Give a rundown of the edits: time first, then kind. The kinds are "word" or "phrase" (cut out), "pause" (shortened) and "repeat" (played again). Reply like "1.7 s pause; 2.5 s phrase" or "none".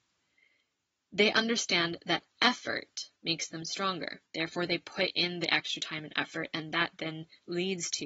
3.2 s pause; 4.3 s pause